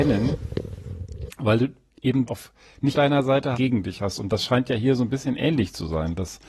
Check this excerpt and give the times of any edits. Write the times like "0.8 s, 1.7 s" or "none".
2.3 s, 2.9 s, 3.5 s